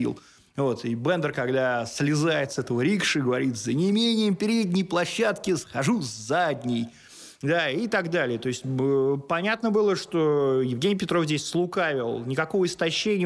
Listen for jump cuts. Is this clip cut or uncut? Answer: uncut